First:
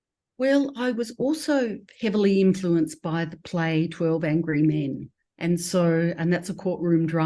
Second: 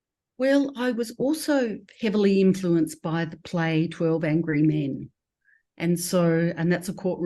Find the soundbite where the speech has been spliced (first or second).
first